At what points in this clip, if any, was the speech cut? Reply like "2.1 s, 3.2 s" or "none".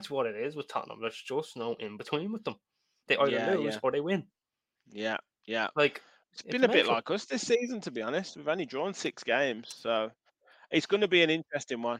none